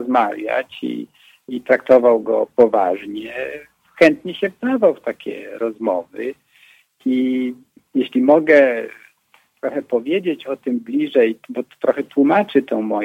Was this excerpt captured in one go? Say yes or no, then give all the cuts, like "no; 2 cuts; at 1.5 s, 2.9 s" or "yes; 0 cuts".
yes; 0 cuts